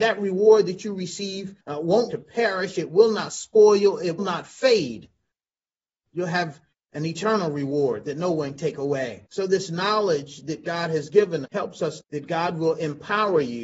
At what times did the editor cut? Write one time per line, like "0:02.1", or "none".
0:01.6
0:02.1
0:04.2
0:06.7
0:08.6
0:09.3
0:11.5
0:12.0